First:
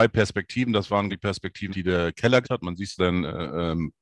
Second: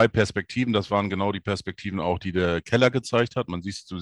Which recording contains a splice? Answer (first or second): first